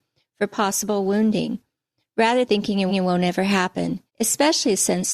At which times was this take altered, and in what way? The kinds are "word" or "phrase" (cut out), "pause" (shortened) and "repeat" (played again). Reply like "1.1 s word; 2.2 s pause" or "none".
2.5 s word; 2.9 s repeat; 4.1 s pause